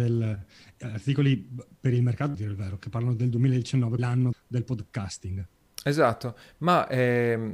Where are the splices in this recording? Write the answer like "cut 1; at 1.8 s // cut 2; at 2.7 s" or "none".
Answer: cut 1; at 2.3 s // cut 2; at 4.0 s // cut 3; at 4.3 s // cut 4; at 5.7 s